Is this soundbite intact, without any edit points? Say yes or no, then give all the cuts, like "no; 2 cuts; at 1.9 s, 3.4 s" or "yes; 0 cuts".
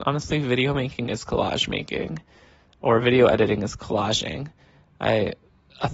yes; 0 cuts